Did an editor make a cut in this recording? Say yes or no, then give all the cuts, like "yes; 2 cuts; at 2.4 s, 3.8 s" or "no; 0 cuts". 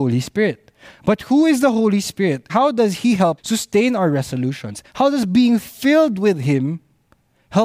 yes; 2 cuts; at 2.5 s, 3.4 s